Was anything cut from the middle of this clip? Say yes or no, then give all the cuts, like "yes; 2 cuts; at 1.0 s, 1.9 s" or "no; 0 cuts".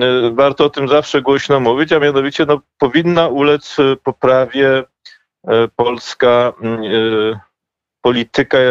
no; 0 cuts